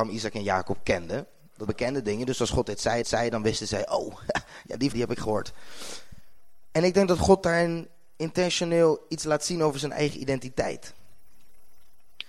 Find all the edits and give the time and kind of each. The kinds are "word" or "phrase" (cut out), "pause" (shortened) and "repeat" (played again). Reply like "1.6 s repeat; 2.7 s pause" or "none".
1.7 s word; 3.0 s repeat; 4.9 s word